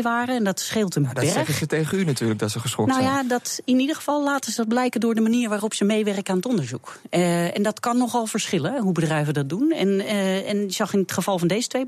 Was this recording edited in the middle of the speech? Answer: no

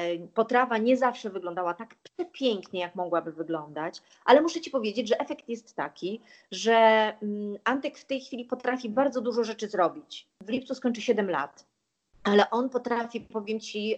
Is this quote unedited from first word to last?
yes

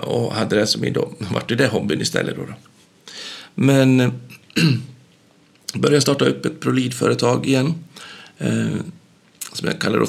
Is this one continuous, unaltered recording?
yes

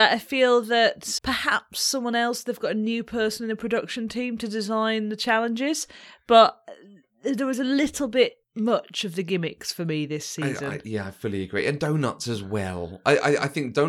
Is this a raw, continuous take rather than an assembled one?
no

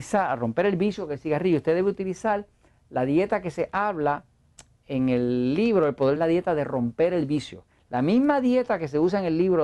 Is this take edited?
yes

